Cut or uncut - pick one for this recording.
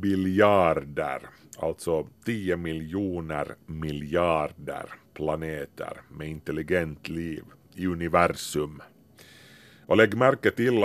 uncut